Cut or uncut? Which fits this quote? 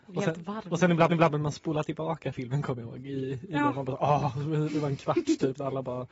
cut